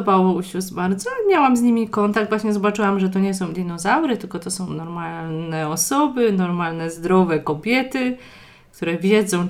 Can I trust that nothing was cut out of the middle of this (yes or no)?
yes